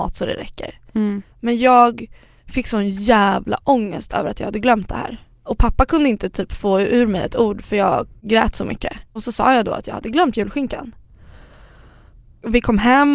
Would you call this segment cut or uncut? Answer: cut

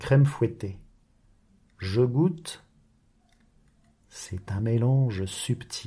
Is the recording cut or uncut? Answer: uncut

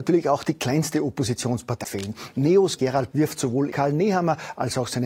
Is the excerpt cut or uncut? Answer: cut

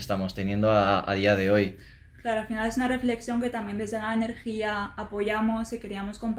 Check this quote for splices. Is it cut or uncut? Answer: uncut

